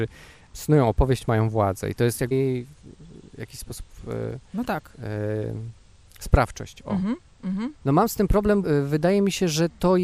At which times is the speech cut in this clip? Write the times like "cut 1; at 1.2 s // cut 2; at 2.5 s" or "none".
cut 1; at 2.3 s // cut 2; at 4.9 s // cut 3; at 7.8 s // cut 4; at 8.6 s